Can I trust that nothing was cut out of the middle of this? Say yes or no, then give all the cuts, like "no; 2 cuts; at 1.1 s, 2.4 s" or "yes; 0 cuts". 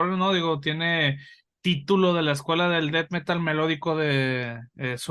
yes; 0 cuts